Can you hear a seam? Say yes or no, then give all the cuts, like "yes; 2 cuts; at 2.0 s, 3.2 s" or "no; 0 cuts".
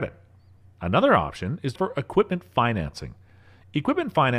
yes; 1 cut; at 1.8 s